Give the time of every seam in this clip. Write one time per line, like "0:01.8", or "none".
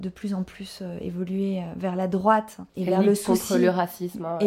0:02.7